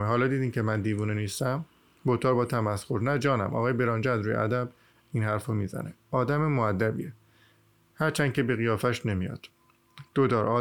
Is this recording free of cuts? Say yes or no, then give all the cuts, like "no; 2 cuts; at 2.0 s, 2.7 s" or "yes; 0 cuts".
yes; 0 cuts